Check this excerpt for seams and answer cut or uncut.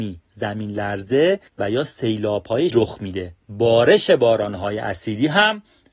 cut